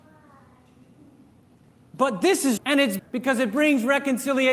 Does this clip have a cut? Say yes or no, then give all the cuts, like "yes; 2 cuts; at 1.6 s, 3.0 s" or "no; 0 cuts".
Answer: yes; 2 cuts; at 2.6 s, 3.0 s